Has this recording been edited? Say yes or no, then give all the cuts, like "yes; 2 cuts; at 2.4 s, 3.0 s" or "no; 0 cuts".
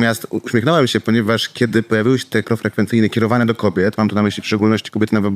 yes; 1 cut; at 2.4 s